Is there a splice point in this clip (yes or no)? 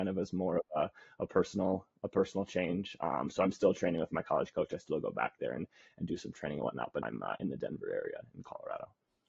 yes